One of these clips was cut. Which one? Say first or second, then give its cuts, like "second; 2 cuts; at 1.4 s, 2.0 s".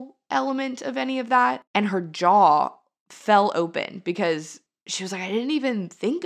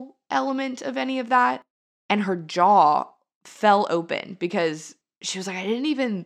first; 1 cut; at 1.7 s